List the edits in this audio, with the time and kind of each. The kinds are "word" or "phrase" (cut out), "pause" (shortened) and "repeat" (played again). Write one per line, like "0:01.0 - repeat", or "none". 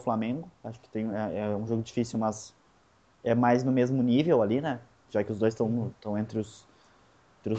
none